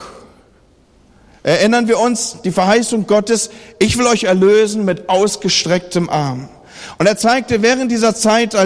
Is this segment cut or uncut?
uncut